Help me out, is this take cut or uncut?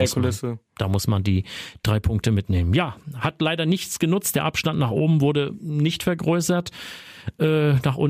uncut